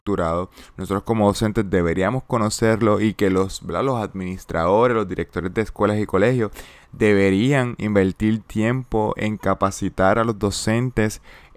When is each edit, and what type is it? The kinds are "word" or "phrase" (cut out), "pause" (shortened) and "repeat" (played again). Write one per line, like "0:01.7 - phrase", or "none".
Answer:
none